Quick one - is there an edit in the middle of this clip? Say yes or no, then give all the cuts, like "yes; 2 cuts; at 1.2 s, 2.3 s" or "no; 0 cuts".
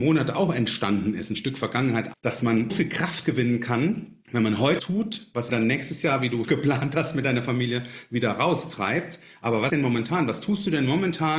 yes; 7 cuts; at 2.1 s, 2.7 s, 4.2 s, 4.8 s, 5.5 s, 6.4 s, 9.7 s